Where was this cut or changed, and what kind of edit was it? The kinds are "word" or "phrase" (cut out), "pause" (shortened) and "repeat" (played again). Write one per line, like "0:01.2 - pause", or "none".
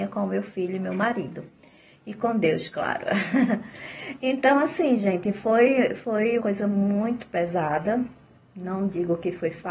0:06.4 - word